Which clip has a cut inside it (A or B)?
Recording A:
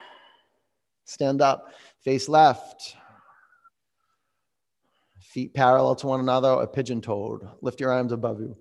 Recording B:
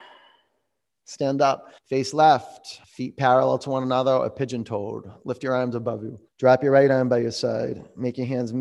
B